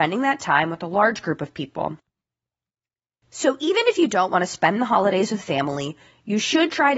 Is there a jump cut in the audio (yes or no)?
no